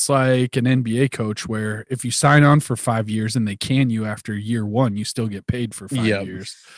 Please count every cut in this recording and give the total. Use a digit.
0